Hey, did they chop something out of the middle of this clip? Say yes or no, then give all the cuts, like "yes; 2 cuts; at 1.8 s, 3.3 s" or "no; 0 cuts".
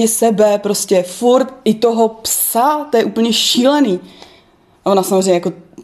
no; 0 cuts